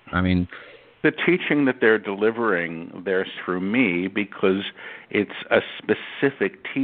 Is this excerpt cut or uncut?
cut